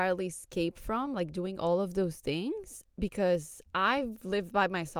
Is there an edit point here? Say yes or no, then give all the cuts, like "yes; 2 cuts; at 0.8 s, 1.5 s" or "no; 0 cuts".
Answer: no; 0 cuts